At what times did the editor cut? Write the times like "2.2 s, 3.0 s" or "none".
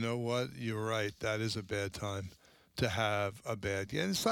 none

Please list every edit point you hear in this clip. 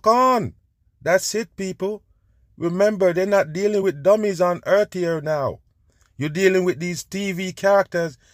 none

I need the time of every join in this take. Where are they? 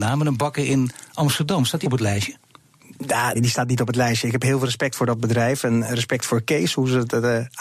1.8 s, 3.3 s

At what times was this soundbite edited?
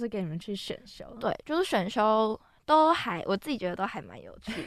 none

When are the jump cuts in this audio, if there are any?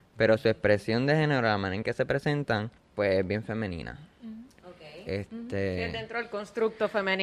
2.8 s

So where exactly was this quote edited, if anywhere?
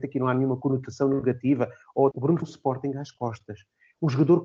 2.1 s, 2.4 s

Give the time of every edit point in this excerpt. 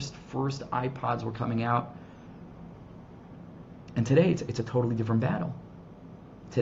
none

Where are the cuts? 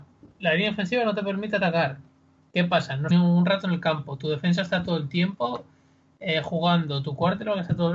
3.1 s

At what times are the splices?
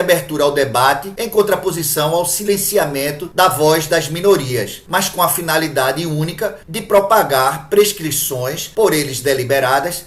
none

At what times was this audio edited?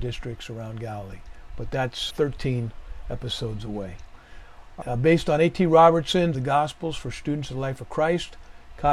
2.1 s, 4.8 s, 6.3 s

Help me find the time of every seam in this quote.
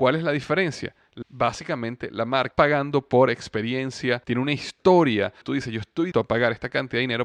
1.2 s, 2.5 s, 4.2 s, 5.4 s, 6.1 s

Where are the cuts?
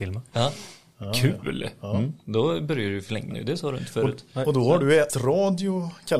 3.3 s, 5.1 s

